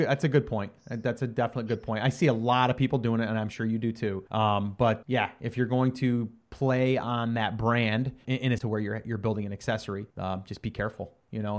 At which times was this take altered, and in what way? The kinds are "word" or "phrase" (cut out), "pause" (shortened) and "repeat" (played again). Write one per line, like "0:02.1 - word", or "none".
0:04.3 - pause
0:05.0 - word
0:08.2 - word
0:08.6 - word
0:10.1 - pause